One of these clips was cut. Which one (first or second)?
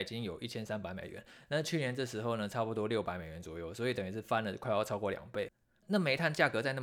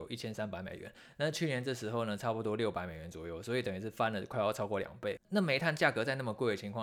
second